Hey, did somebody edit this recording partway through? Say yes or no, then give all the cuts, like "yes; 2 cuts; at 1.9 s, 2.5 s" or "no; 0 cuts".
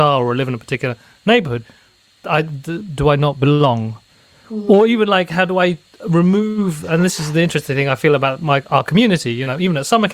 no; 0 cuts